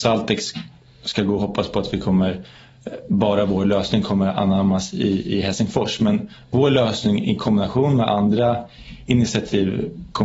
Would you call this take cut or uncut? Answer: uncut